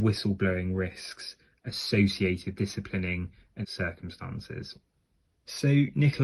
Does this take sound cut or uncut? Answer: cut